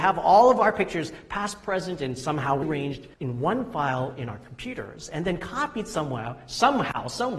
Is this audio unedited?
no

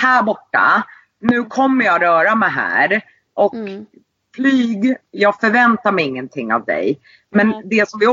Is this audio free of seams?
yes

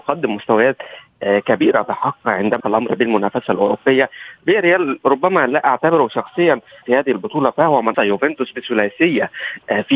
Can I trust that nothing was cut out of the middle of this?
no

